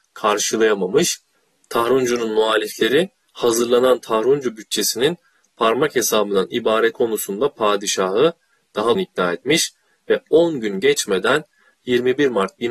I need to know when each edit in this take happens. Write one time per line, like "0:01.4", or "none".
0:06.9
0:09.0